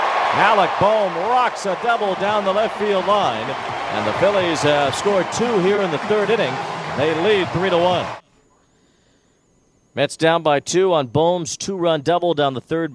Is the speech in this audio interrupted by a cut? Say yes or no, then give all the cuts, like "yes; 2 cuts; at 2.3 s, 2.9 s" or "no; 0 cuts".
no; 0 cuts